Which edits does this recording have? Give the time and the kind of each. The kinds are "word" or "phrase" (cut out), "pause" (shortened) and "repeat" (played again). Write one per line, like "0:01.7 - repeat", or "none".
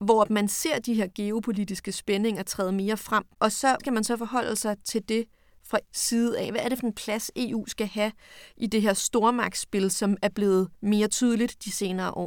0:03.3 - pause
0:03.8 - word
0:05.8 - word
0:10.7 - pause